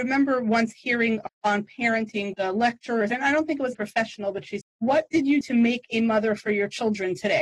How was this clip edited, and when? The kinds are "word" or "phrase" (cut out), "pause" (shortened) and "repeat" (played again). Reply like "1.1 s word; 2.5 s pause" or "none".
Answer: 1.3 s word; 2.3 s word; 3.1 s word; 3.7 s word; 4.6 s word; 5.4 s word